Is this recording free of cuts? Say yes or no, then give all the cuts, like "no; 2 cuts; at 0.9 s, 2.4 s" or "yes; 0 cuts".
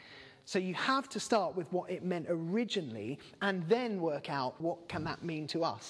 no; 1 cut; at 4.6 s